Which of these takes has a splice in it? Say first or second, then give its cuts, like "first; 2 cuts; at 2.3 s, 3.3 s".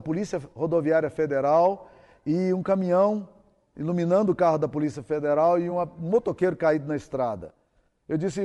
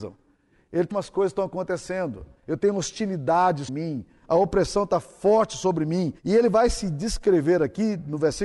second; 4 cuts; at 0.9 s, 2.4 s, 3.7 s, 6.2 s